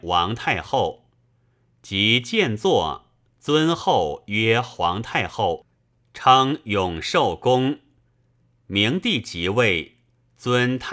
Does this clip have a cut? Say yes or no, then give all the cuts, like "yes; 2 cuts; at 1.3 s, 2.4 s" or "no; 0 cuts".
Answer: no; 0 cuts